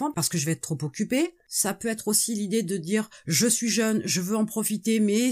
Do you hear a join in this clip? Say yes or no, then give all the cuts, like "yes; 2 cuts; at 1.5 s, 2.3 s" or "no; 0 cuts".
no; 0 cuts